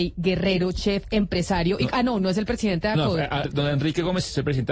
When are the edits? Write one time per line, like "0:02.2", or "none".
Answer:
0:03.4